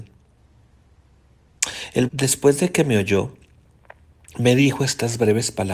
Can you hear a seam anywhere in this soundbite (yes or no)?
yes